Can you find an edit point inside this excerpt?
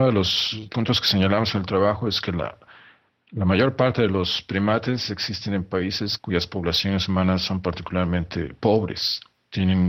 no; 0 cuts

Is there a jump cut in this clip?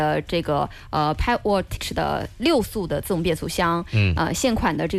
yes; 1 cut; at 1.8 s

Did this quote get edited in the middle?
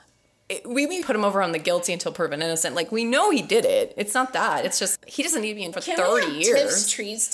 yes; 3 cuts; at 1.0 s, 5.0 s, 5.7 s

